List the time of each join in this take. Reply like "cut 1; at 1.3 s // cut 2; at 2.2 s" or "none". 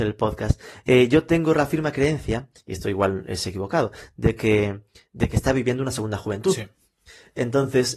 none